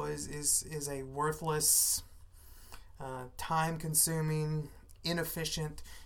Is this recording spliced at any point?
no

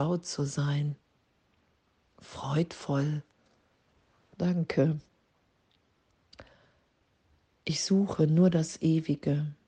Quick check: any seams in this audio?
no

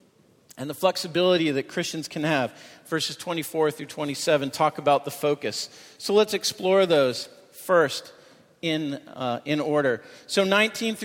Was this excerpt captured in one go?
yes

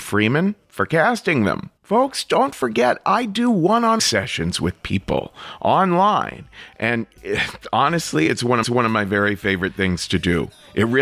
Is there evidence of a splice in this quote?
yes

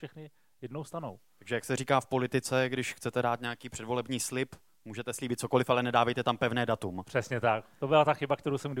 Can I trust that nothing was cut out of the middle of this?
yes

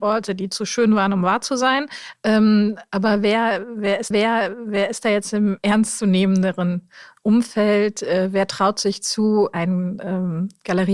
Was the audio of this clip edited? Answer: yes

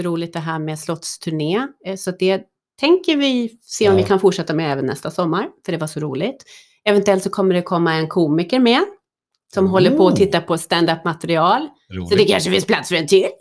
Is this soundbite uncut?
yes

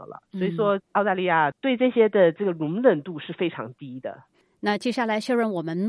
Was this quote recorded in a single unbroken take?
yes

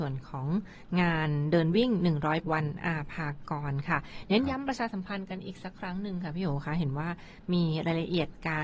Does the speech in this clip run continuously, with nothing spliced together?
no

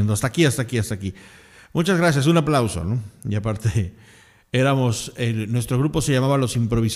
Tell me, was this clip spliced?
no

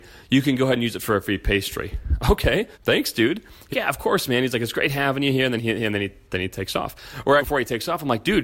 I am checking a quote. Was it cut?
yes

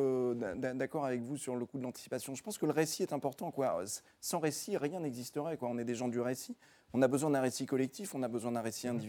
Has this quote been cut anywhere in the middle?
no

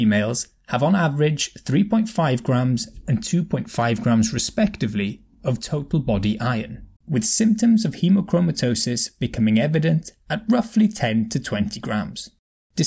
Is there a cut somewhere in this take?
yes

